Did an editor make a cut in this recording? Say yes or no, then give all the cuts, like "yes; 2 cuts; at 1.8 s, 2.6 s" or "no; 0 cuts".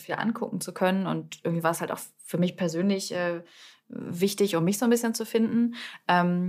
no; 0 cuts